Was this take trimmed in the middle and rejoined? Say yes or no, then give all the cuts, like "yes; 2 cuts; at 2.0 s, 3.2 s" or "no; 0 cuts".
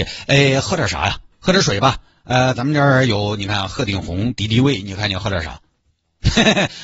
no; 0 cuts